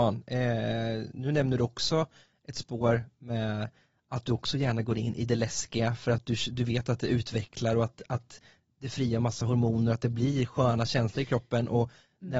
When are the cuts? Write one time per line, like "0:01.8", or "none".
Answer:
none